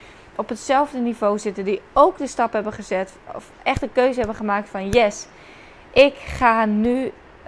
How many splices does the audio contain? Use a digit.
0